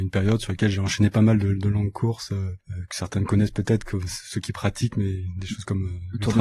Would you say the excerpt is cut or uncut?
cut